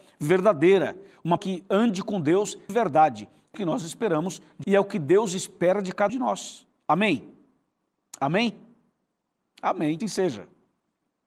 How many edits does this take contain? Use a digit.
6